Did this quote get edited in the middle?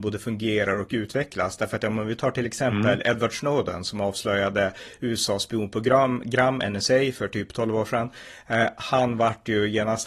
no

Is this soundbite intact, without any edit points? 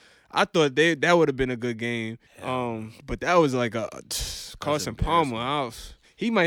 no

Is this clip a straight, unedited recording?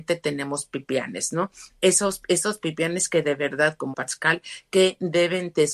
no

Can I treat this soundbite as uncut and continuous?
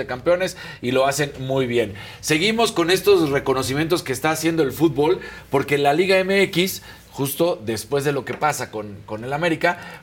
yes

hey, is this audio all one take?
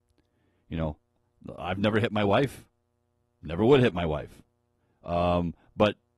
yes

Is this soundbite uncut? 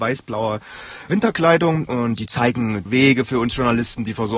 no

